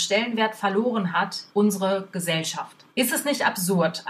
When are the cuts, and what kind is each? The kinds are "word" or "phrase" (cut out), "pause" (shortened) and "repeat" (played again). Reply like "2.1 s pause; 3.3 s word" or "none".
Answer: 1.5 s pause; 2.9 s pause